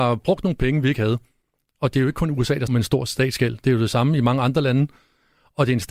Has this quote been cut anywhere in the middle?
yes; 1 cut; at 2.7 s

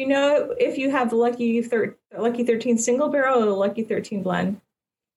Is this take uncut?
no; 1 cut; at 2.0 s

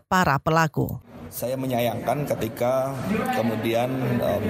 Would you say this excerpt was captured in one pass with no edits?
yes; 0 cuts

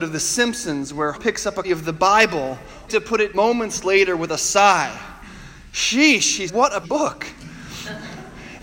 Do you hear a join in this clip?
yes; 6 cuts; at 1.1 s, 1.6 s, 2.9 s, 3.3 s, 6.5 s, 6.8 s

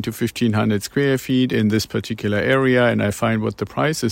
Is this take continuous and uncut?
yes; 0 cuts

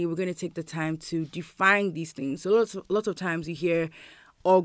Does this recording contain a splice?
no; 0 cuts

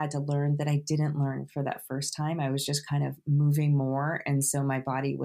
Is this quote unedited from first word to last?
yes; 0 cuts

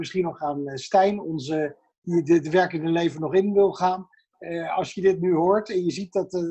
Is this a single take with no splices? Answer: yes; 0 cuts

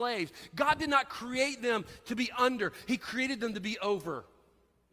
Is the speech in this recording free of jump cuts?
yes; 0 cuts

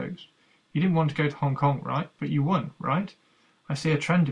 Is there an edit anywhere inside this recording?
no; 0 cuts

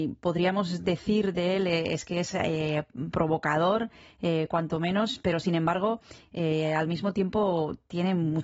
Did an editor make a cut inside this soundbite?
no; 0 cuts

